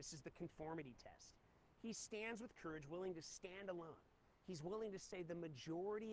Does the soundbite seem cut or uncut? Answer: uncut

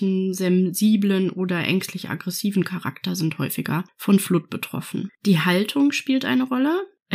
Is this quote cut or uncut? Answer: uncut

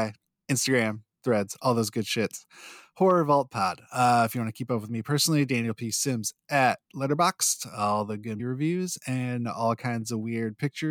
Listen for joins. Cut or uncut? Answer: cut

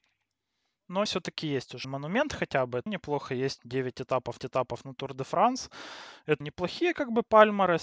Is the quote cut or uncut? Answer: cut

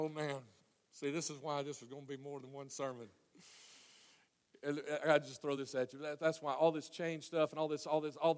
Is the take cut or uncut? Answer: uncut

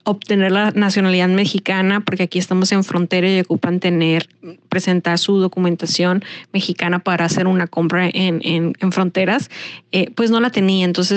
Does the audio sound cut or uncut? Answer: uncut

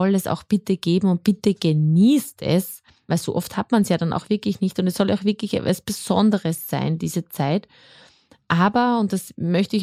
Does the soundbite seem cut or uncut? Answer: uncut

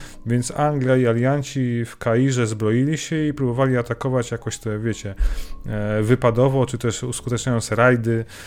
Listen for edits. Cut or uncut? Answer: uncut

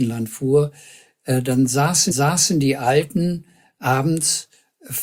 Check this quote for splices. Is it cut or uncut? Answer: cut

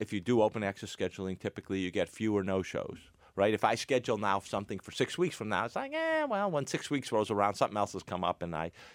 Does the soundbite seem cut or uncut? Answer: uncut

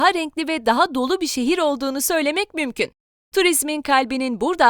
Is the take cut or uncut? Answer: uncut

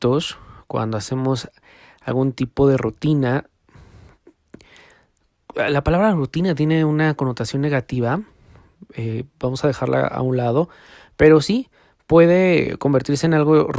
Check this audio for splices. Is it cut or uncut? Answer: uncut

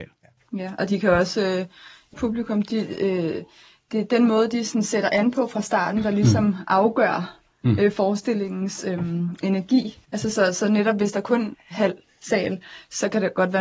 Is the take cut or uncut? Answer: cut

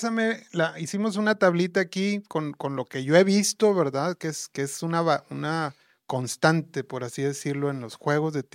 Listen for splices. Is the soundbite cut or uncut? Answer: uncut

